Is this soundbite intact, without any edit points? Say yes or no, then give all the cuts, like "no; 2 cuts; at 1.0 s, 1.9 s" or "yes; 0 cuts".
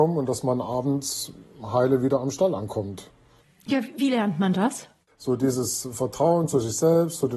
yes; 0 cuts